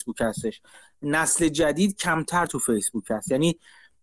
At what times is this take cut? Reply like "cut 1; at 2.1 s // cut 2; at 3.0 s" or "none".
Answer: none